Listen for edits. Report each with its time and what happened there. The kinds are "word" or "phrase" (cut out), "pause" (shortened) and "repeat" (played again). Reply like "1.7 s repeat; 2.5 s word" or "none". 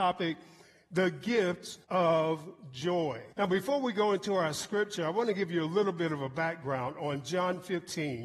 1.8 s pause; 3.3 s pause